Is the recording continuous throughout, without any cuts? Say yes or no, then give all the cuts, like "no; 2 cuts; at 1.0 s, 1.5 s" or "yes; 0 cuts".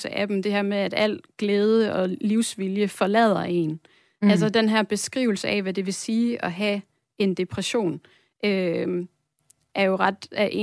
yes; 0 cuts